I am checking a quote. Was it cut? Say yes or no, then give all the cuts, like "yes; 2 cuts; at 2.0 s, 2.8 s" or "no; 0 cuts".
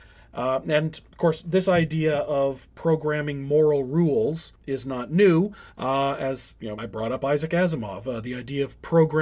yes; 3 cuts; at 4.6 s, 5.7 s, 6.8 s